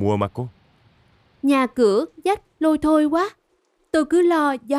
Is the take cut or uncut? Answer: uncut